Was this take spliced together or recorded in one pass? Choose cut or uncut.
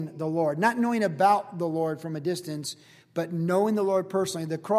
uncut